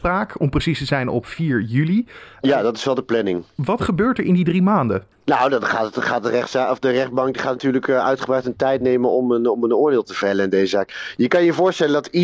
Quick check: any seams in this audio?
no; 0 cuts

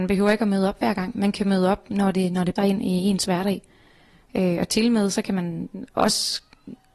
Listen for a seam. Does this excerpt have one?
yes; 1 cut; at 2.6 s

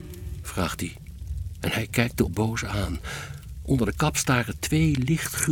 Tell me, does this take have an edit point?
yes; 1 cut; at 2.3 s

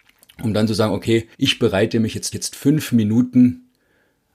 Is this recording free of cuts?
no; 2 cuts; at 1.3 s, 2.3 s

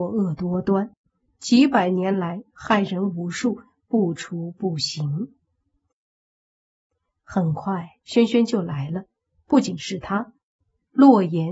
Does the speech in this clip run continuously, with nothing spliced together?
no; 1 cut; at 8.0 s

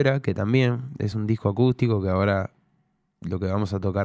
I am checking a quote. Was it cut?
no; 0 cuts

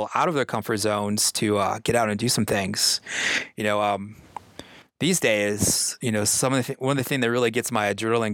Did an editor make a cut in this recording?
no; 0 cuts

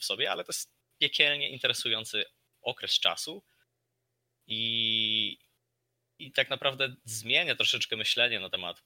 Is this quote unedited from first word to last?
yes; 0 cuts

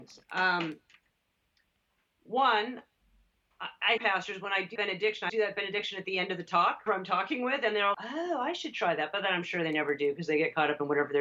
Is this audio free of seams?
no; 5 cuts; at 4.0 s, 4.8 s, 5.3 s, 6.9 s, 7.9 s

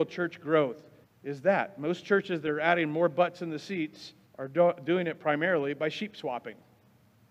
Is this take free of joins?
no; 2 cuts; at 1.0 s, 4.3 s

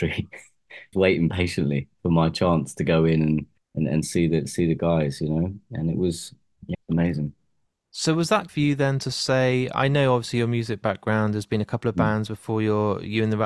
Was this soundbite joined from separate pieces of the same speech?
yes; 4 cuts; at 0.9 s, 3.6 s, 6.7 s, 8.5 s

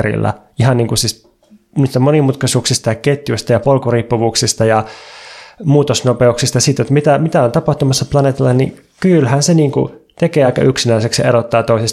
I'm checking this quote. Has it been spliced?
no; 0 cuts

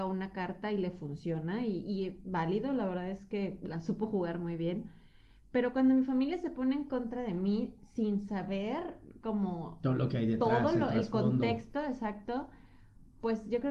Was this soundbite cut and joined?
no; 0 cuts

